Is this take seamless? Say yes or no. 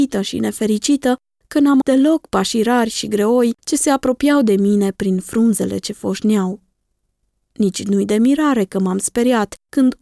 no